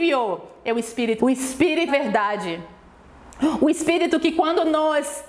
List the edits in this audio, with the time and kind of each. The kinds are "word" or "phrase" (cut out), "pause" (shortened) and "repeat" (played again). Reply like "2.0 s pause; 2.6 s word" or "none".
1.2 s word; 1.9 s word